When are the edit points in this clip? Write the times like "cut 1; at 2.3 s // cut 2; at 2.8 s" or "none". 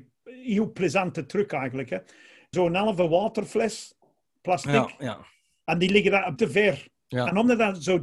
cut 1; at 2.5 s // cut 2; at 6.4 s // cut 3; at 7.0 s